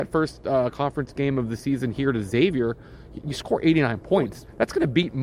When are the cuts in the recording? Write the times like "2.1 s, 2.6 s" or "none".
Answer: none